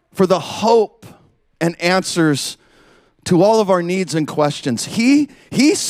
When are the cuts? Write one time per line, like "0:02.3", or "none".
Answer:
none

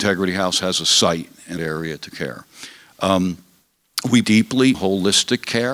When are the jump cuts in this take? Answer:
0:01.6
0:02.1
0:04.2
0:04.7

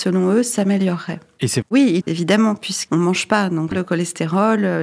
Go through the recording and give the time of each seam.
0:01.6
0:02.0
0:02.9
0:03.7

